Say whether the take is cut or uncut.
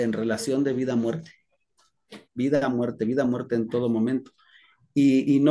cut